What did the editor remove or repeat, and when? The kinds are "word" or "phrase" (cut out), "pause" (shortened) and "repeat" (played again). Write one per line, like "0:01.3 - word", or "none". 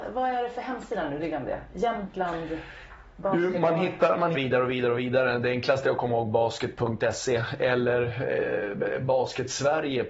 0:04.3 - phrase